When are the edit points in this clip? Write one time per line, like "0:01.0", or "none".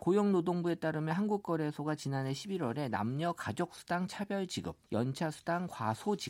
0:04.8